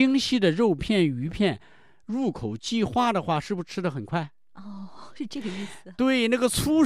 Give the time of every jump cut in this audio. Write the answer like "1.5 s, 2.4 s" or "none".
none